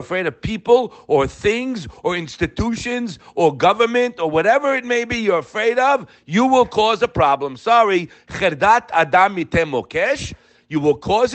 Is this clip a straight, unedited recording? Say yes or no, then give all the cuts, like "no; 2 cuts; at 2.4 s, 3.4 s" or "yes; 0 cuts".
yes; 0 cuts